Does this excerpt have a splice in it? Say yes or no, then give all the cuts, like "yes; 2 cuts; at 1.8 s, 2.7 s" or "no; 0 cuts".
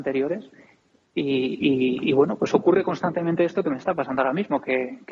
no; 0 cuts